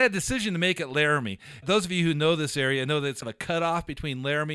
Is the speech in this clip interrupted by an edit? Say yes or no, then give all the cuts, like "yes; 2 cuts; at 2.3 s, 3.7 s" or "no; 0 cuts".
yes; 2 cuts; at 1.6 s, 3.2 s